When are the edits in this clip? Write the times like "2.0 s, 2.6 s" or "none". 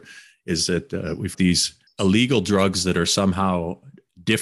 1.3 s, 1.9 s